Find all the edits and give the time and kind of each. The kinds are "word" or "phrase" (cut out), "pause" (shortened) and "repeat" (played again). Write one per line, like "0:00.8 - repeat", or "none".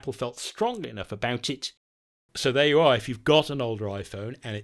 none